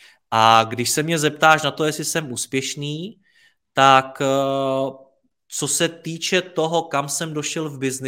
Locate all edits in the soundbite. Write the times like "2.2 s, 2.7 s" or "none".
none

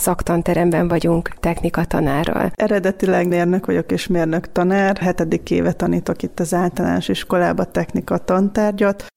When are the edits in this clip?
1.4 s

